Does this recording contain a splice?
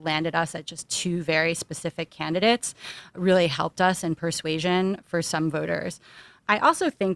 no; 0 cuts

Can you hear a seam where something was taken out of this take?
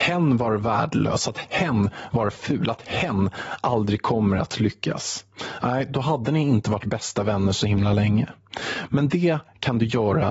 no; 0 cuts

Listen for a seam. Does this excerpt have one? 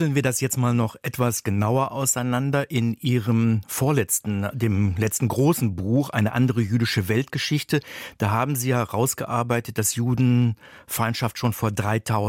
no; 0 cuts

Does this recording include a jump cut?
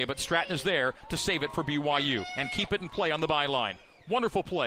no; 0 cuts

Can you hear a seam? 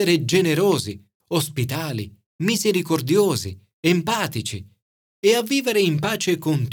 no; 0 cuts

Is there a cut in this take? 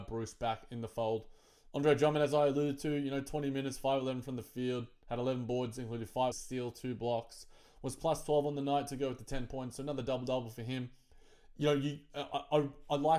yes; 1 cut; at 6.3 s

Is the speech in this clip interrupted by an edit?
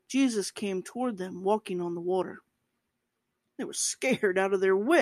no; 0 cuts

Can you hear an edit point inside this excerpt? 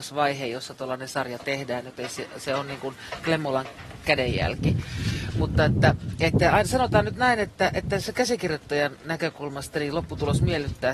no; 0 cuts

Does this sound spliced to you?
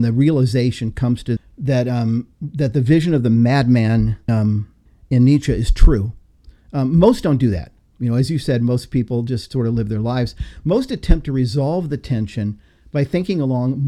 yes; 4 cuts; at 1.4 s, 2.3 s, 4.3 s, 4.9 s

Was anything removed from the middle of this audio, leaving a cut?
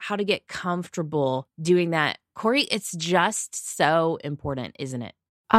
yes; 1 cut; at 1.5 s

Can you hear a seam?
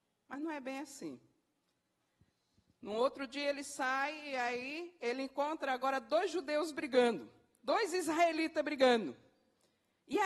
no; 0 cuts

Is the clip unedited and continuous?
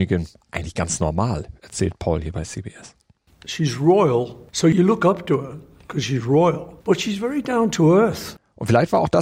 no; 1 cut; at 6.8 s

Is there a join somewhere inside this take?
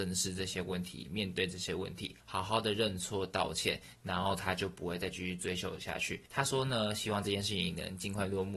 yes; 2 cuts; at 2.2 s, 6.3 s

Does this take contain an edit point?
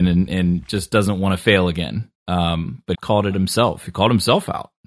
yes; 2 cuts; at 2.9 s, 3.3 s

